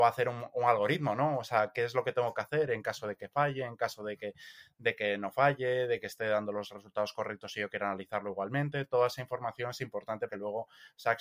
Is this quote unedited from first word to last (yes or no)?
no